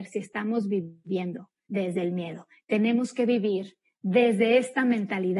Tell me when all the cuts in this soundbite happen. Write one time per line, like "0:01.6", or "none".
none